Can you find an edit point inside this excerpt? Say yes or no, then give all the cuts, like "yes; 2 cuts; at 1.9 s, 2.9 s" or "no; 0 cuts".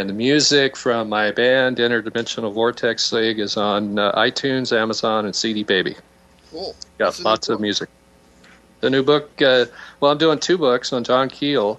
no; 0 cuts